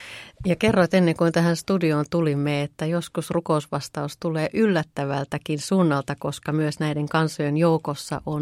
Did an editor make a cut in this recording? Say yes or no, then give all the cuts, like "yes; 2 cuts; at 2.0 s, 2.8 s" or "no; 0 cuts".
no; 0 cuts